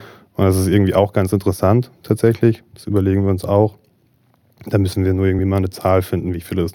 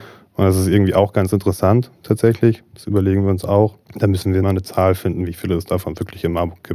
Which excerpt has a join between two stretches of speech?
second; 2 cuts; at 3.8 s, 4.4 s

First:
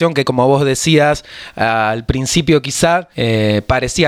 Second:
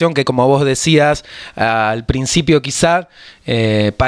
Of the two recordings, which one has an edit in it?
first; 1 cut; at 3.1 s

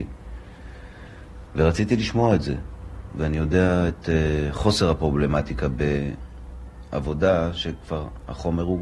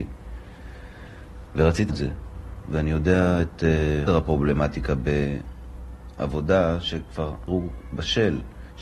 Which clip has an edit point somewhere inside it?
second; 3 cuts; at 1.9 s, 4.1 s, 7.5 s

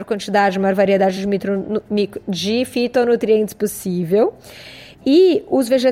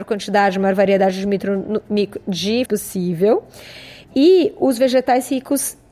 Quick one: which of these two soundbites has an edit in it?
second; 1 cut; at 2.7 s

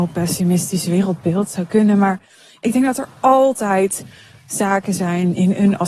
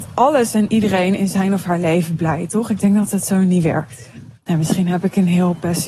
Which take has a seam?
second; 1 cut; at 4.4 s

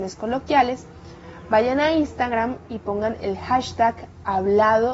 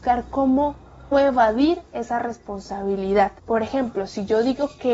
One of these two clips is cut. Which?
second; 2 cuts; at 1.1 s, 3.4 s

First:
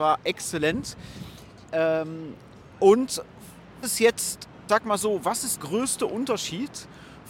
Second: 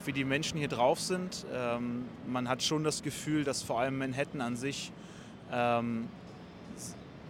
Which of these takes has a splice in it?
first; 3 cuts; at 3.8 s, 4.7 s, 5.6 s

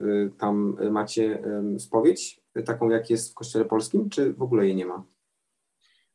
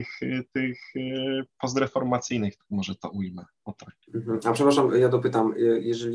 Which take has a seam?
second; 1 cut; at 4.0 s

